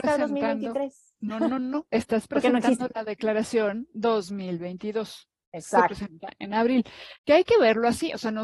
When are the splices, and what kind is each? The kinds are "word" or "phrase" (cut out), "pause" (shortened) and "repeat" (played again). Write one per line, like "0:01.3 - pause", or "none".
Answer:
0:07.2 - pause